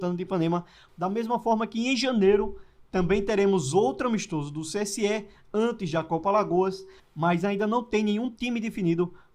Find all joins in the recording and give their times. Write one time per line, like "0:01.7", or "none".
none